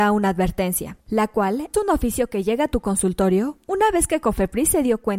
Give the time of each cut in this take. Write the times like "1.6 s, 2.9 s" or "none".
1.0 s, 1.7 s